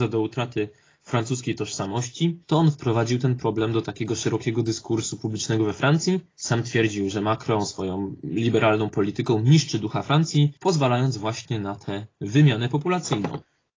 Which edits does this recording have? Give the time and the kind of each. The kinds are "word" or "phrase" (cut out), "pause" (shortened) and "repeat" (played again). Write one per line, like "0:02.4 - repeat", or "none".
0:02.4 - pause
0:06.3 - pause
0:10.6 - pause